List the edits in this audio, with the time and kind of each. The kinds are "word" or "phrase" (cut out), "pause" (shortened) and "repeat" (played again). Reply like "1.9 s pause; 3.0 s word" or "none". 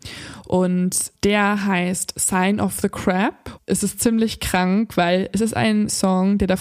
1.1 s pause; 3.6 s word